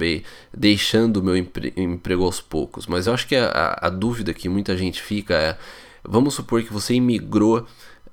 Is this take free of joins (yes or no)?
yes